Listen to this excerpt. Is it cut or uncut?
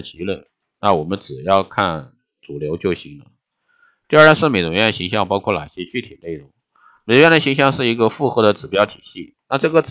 uncut